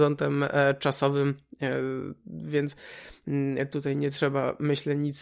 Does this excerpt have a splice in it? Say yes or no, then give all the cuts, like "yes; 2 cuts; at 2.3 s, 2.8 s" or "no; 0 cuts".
no; 0 cuts